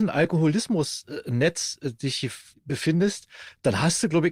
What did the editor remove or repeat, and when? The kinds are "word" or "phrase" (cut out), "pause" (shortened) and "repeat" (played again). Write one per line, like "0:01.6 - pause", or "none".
0:02.5 - pause